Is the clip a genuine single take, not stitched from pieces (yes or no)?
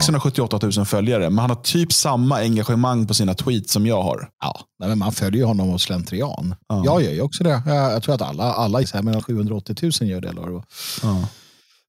no